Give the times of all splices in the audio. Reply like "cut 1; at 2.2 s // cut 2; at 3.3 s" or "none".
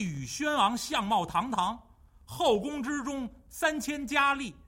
none